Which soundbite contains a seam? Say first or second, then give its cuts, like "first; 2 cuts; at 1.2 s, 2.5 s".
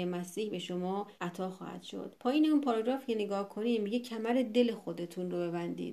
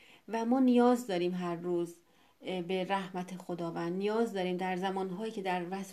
first; 2 cuts; at 1.1 s, 2.2 s